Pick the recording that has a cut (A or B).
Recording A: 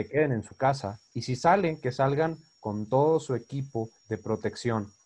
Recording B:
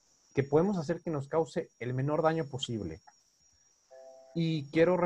A